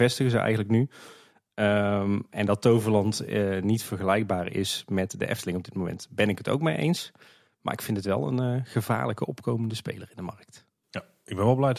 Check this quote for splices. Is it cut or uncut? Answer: uncut